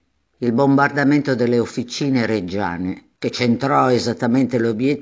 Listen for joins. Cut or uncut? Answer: cut